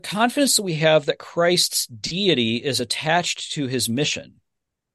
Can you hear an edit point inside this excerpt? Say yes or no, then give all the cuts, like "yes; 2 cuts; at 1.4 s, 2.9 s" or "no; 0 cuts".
no; 0 cuts